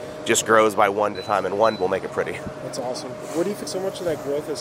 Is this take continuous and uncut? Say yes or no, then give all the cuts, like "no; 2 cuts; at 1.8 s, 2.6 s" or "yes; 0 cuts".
no; 3 cuts; at 1.1 s, 1.8 s, 3.6 s